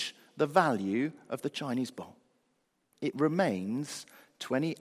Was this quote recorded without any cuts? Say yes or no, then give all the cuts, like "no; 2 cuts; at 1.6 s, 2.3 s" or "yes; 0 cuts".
yes; 0 cuts